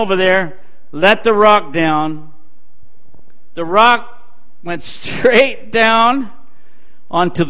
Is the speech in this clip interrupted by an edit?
no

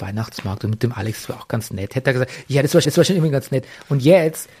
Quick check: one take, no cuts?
no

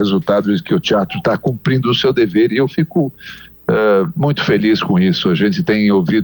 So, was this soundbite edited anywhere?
no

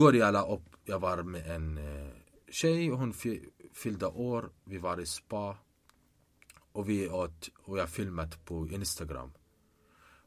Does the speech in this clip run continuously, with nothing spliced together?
yes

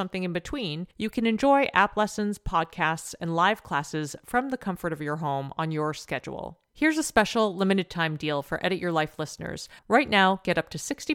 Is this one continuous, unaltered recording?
no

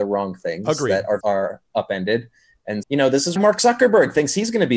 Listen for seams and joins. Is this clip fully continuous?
no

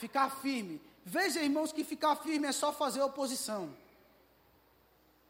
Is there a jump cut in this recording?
no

